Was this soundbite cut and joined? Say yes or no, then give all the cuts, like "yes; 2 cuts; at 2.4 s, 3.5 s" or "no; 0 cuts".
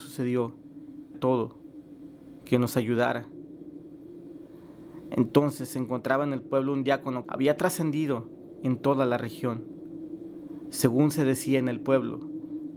yes; 2 cuts; at 1.1 s, 7.2 s